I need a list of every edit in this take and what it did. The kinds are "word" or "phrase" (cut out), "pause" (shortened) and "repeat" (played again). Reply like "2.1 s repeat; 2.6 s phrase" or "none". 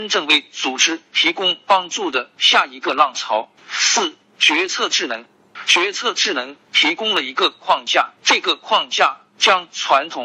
3.6 s pause; 8.2 s pause